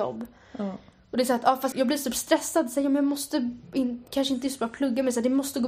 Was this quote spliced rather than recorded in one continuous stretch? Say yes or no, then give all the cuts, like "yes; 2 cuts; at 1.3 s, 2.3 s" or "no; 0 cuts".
yes; 1 cut; at 1.7 s